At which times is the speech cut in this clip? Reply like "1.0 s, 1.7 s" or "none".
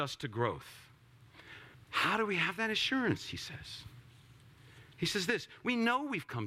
1.7 s